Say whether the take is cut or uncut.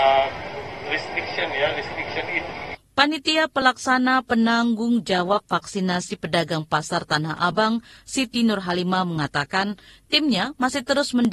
uncut